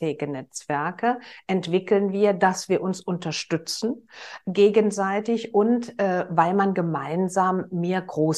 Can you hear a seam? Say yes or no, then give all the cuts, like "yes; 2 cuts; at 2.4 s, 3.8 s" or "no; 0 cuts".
no; 0 cuts